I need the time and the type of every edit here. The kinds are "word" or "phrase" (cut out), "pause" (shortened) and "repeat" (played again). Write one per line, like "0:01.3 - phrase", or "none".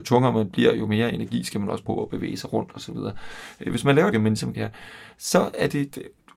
0:01.8 - word
0:04.1 - phrase
0:04.5 - phrase